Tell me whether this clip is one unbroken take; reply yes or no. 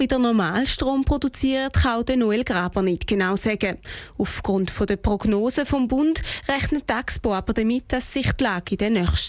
yes